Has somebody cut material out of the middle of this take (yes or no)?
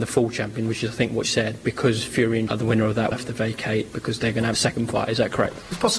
yes